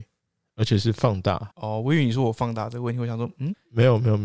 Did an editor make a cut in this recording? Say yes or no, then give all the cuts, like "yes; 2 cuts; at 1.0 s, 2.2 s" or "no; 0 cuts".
yes; 1 cut; at 1.5 s